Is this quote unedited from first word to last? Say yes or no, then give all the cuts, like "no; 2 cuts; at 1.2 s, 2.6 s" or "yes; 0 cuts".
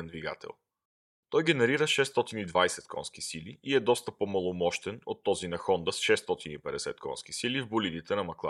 yes; 0 cuts